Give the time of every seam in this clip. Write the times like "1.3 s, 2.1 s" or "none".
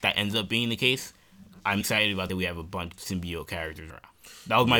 1.8 s, 2.3 s, 2.9 s, 3.9 s